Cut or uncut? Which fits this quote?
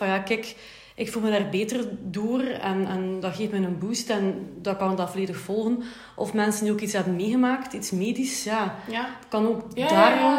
uncut